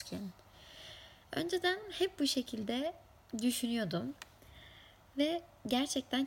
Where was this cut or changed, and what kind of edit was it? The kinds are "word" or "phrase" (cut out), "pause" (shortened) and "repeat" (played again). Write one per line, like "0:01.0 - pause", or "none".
none